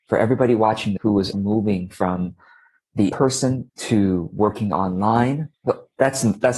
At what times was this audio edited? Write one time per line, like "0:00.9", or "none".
0:01.0
0:01.3
0:03.1
0:03.7
0:05.5